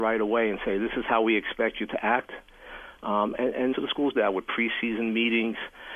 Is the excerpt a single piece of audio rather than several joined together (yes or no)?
no